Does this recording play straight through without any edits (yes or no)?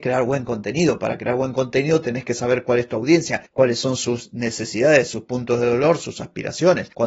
no